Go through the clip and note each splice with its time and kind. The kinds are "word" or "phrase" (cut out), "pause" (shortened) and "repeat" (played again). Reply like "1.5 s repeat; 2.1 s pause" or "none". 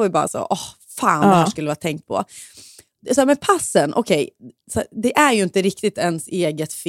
none